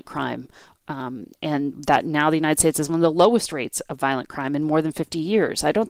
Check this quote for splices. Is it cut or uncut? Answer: cut